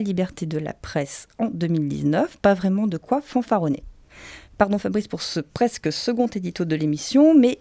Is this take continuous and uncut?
yes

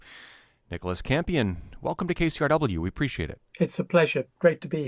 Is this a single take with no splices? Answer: no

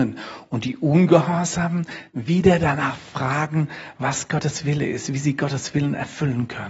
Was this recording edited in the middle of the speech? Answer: no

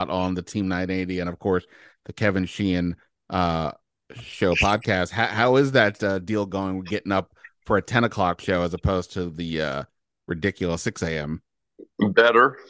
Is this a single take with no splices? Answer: yes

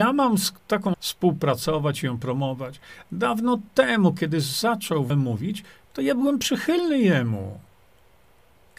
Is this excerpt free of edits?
no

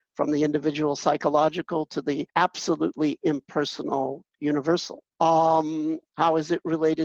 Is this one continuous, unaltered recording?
no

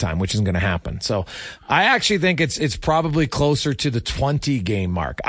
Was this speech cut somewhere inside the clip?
no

